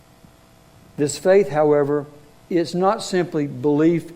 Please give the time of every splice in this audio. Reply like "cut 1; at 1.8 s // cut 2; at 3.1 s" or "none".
none